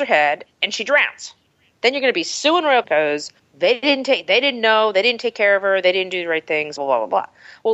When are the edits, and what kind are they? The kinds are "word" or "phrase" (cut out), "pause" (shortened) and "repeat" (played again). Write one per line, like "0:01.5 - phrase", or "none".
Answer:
0:02.8 - word
0:03.4 - pause
0:06.8 - word